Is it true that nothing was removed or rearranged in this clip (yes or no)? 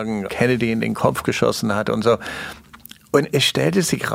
yes